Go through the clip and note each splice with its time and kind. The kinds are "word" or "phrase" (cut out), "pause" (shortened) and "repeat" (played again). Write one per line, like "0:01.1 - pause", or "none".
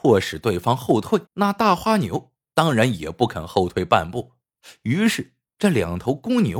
0:01.3 - pause

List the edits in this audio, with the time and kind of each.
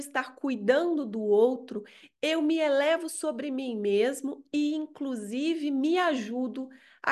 none

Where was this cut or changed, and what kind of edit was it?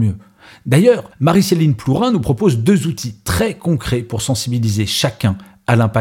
0:01.1 - pause

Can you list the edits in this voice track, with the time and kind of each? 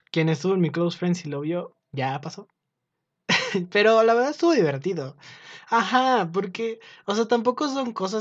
0:01.8 - pause

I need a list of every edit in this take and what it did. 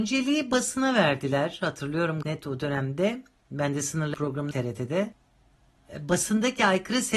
0:02.2 - word
0:04.1 - word
0:04.5 - word

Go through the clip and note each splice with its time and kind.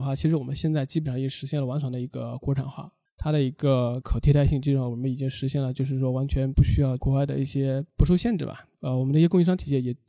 0:03.1 - pause

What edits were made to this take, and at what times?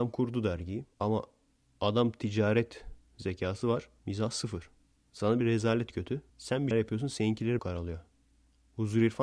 0:00.9 - pause
0:03.0 - pause
0:04.0 - pause
0:05.4 - phrase
0:06.3 - pause
0:06.7 - word
0:07.6 - phrase

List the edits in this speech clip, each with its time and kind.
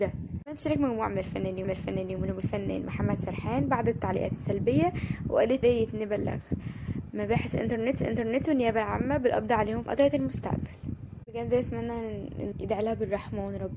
0:01.6 - repeat
0:05.6 - word
0:08.0 - repeat
0:09.8 - phrase
0:12.5 - word

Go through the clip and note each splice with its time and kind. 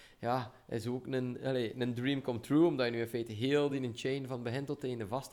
none

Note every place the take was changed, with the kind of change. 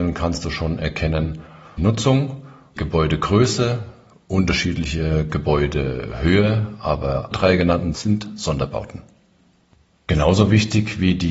0:01.8 - word
0:02.8 - word
0:07.3 - word
0:07.9 - word

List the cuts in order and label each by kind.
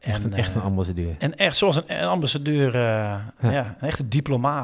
none

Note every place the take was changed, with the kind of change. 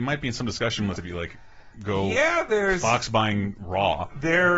0:01.0 - word

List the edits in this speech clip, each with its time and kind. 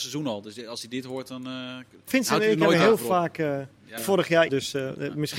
0:02.1 - word
0:04.0 - phrase
0:04.5 - word

